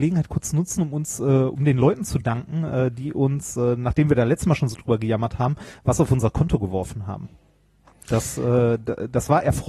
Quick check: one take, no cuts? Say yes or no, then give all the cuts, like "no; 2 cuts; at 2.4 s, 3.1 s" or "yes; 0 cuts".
yes; 0 cuts